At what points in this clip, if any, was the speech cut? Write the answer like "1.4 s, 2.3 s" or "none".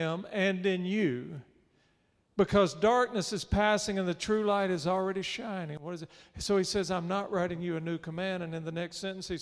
none